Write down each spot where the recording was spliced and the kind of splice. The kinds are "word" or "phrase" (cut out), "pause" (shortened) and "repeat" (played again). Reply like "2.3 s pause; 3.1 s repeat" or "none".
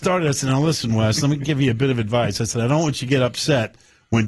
none